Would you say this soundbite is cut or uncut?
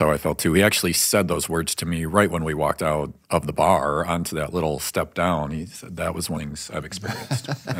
cut